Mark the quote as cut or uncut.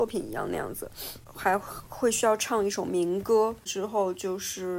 cut